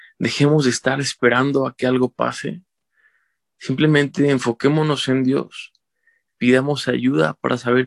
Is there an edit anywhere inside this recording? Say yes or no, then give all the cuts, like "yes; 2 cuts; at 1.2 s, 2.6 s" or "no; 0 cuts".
no; 0 cuts